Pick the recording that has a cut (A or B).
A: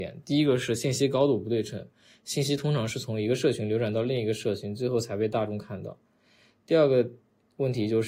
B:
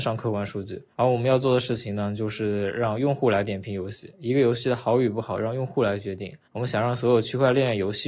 B